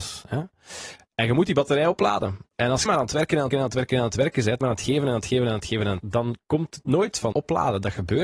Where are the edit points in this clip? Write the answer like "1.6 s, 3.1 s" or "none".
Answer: 2.9 s, 3.5 s, 4.6 s, 6.0 s, 7.3 s